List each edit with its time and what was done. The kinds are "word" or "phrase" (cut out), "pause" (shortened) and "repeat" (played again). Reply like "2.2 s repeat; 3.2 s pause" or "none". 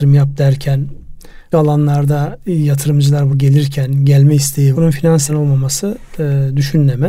1.5 s word; 2.4 s word; 3.3 s word; 4.7 s word; 5.3 s word